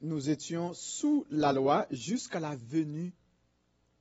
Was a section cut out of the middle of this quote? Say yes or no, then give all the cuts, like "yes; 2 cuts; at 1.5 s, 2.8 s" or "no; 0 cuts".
no; 0 cuts